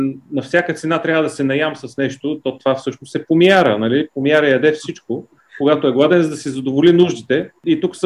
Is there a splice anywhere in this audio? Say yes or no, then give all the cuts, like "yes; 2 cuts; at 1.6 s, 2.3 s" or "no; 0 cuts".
no; 0 cuts